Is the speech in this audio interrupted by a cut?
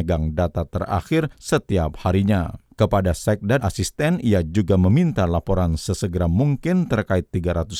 yes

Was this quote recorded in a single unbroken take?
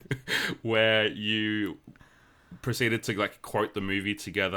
yes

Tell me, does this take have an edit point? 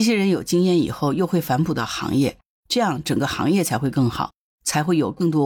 no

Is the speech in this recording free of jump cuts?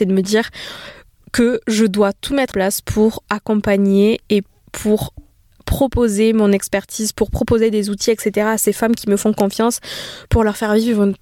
no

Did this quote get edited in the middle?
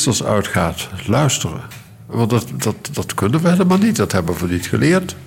no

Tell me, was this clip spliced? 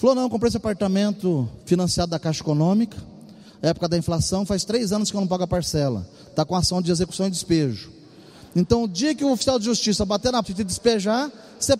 yes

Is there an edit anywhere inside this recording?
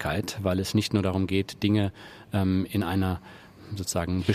no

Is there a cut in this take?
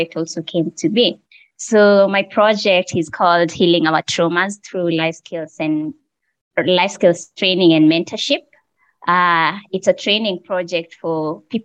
no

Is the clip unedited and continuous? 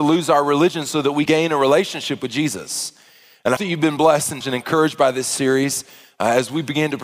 no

